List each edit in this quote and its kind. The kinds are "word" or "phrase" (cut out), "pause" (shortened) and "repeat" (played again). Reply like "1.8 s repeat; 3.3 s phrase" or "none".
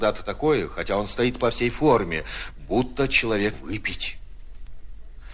3.5 s word